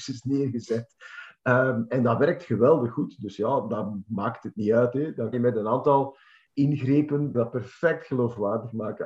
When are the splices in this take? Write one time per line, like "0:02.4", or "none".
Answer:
0:05.3
0:07.3